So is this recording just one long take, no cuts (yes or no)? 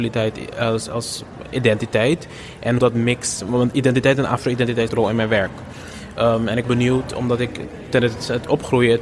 no